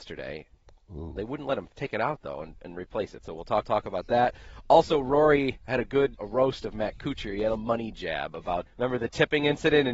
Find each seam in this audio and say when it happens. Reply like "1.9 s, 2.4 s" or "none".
1.7 s, 3.6 s, 6.1 s, 7.6 s, 8.7 s